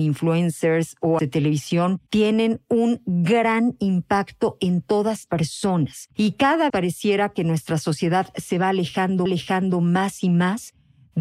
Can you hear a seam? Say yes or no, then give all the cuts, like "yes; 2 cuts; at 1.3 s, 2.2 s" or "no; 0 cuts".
yes; 6 cuts; at 1.2 s, 2.1 s, 5.3 s, 6.1 s, 6.7 s, 9.3 s